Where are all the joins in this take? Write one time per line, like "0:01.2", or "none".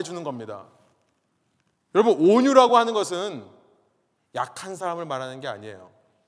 none